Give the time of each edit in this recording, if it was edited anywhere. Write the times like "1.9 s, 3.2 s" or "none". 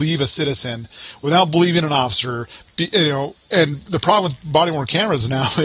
3.4 s